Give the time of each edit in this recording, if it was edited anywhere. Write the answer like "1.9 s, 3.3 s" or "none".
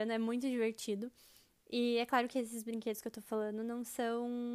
none